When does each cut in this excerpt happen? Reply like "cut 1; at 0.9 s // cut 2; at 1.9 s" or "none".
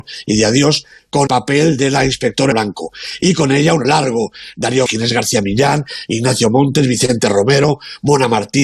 cut 1; at 1.3 s // cut 2; at 2.5 s // cut 3; at 3.8 s // cut 4; at 4.9 s